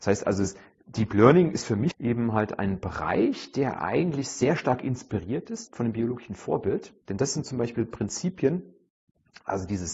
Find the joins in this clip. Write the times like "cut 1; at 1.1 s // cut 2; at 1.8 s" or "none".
cut 1; at 1.9 s // cut 2; at 5.7 s // cut 3; at 7.0 s